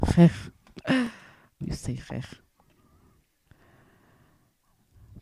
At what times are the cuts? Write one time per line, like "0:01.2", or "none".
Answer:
0:01.6